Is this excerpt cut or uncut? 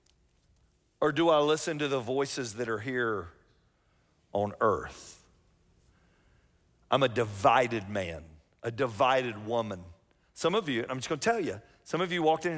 uncut